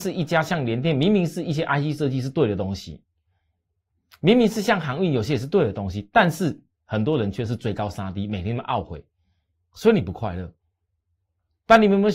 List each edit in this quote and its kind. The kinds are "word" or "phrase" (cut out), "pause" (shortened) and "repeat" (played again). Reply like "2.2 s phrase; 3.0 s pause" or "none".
none